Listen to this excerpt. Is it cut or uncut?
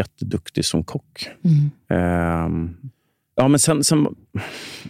uncut